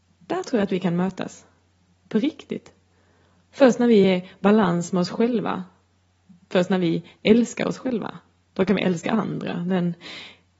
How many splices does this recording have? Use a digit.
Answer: 0